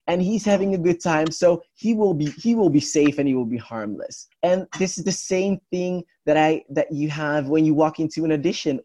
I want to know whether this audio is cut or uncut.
cut